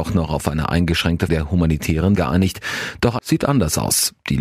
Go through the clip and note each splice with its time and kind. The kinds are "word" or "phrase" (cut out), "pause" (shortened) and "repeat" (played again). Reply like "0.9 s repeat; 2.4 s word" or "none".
1.3 s word; 2.2 s word; 3.2 s word